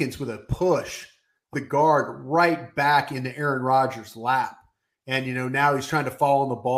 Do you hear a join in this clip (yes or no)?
yes